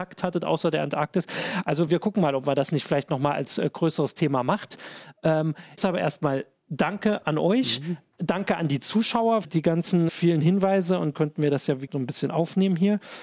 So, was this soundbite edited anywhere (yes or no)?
yes